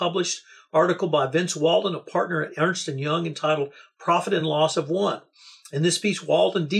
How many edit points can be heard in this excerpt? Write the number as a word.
zero